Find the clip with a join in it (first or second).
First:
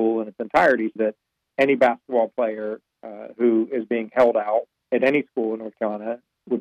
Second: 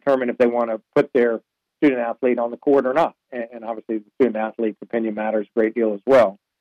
first